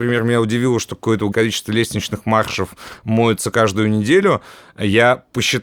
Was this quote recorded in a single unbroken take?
no; 1 cut; at 1.3 s

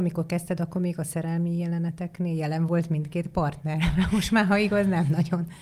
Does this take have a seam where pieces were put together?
no; 0 cuts

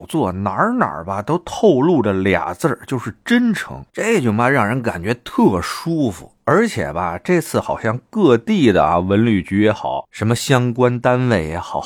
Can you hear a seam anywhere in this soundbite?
yes; 1 cut; at 3.9 s

